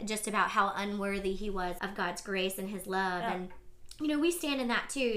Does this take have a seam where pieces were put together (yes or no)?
yes